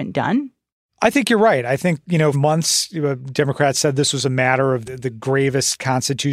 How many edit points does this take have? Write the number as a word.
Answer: two